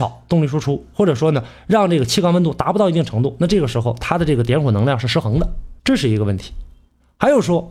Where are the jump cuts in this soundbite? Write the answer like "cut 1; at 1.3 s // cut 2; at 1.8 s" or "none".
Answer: cut 1; at 5.8 s

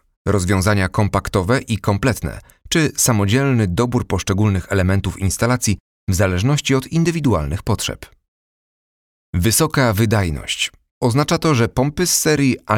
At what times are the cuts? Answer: none

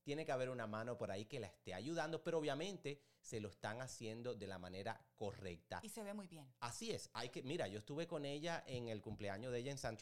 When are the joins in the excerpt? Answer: none

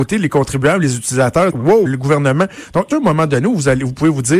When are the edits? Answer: cut 1; at 1.5 s // cut 2; at 1.9 s // cut 3; at 2.9 s

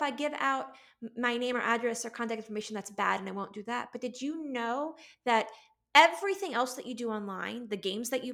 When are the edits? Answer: none

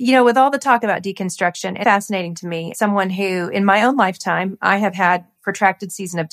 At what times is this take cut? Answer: cut 1; at 1.8 s // cut 2; at 2.7 s // cut 3; at 5.4 s

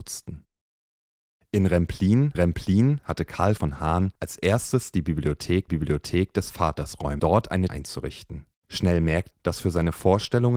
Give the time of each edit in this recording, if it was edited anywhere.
cut 1; at 2.3 s // cut 2; at 3.6 s // cut 3; at 4.1 s // cut 4; at 5.7 s // cut 5; at 7.2 s // cut 6; at 7.7 s // cut 7; at 8.6 s // cut 8; at 9.3 s

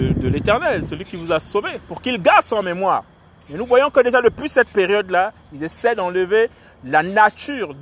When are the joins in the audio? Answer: none

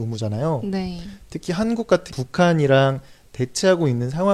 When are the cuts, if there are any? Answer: cut 1; at 2.1 s

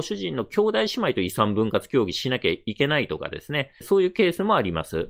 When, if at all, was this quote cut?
none

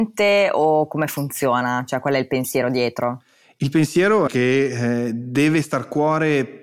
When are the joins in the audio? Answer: cut 1; at 4.3 s

